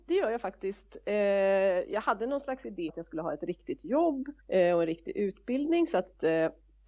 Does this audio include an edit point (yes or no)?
yes